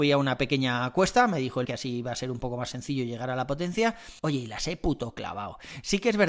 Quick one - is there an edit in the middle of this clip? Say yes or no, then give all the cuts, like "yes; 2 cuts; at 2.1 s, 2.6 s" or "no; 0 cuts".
yes; 2 cuts; at 1.7 s, 4.2 s